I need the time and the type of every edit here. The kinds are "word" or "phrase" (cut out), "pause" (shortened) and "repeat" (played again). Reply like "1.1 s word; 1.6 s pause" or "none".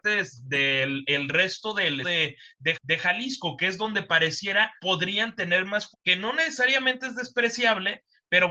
2.0 s word; 2.7 s repeat; 4.8 s pause; 5.9 s word